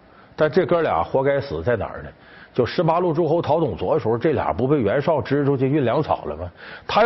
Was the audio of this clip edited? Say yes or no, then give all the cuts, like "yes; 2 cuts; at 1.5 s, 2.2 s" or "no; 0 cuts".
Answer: no; 0 cuts